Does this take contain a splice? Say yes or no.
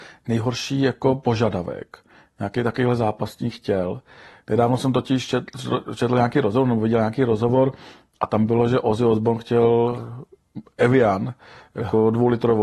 no